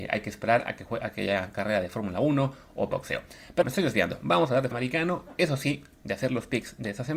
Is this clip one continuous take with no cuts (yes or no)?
no